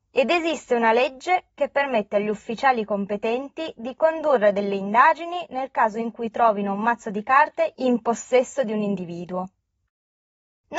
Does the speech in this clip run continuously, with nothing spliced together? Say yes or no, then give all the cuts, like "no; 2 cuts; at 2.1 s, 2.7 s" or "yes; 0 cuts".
yes; 0 cuts